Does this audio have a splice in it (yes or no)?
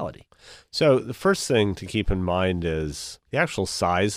yes